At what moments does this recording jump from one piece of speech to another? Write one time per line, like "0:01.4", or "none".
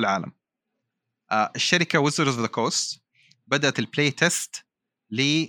0:03.7